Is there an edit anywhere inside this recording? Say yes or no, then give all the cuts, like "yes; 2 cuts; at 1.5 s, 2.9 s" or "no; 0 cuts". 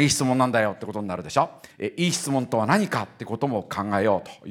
yes; 1 cut; at 1.7 s